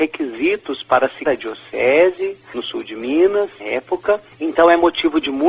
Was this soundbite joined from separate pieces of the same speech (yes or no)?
yes